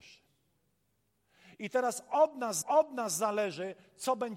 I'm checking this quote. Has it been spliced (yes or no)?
yes